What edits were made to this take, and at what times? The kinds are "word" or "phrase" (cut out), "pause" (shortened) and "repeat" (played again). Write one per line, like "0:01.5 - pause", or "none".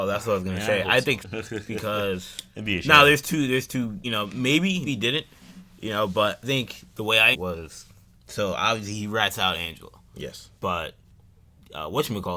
0:01.2 - word
0:04.0 - word
0:04.9 - word
0:06.4 - word
0:07.3 - word
0:08.1 - pause
0:10.6 - pause